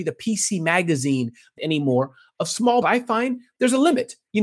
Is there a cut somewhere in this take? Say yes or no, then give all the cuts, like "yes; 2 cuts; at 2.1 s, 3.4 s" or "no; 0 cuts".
yes; 2 cuts; at 1.6 s, 2.8 s